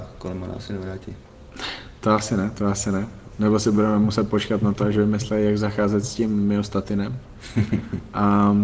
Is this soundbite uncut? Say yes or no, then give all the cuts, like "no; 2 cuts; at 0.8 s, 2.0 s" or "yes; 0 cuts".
yes; 0 cuts